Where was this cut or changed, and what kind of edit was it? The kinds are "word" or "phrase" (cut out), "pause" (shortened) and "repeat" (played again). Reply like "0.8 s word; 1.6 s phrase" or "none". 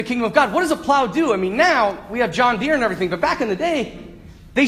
none